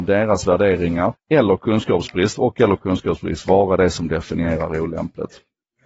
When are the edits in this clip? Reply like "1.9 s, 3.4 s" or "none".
1.1 s